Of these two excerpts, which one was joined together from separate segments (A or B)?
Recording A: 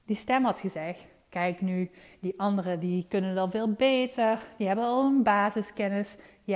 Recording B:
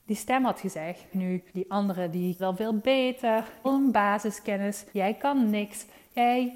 B